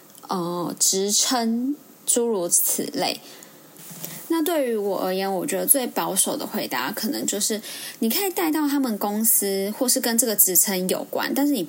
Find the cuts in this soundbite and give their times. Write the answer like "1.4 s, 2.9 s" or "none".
none